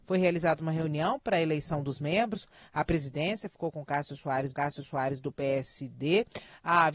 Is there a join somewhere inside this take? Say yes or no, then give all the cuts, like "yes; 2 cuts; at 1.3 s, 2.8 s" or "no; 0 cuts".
yes; 1 cut; at 4.5 s